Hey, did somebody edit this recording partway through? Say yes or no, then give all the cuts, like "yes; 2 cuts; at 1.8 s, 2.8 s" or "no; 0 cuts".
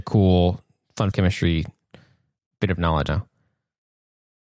yes; 2 cuts; at 1.1 s, 3.1 s